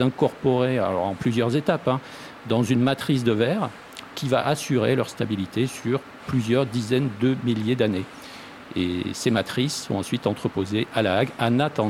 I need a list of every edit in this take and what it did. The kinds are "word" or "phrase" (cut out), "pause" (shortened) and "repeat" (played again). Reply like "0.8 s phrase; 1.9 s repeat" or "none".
none